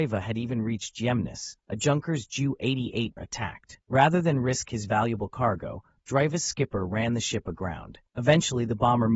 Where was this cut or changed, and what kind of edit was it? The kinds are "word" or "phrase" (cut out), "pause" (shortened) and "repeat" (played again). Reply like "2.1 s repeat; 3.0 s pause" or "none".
1.6 s pause; 3.2 s word; 3.8 s pause; 8.1 s pause